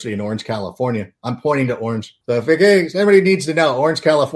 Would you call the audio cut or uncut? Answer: cut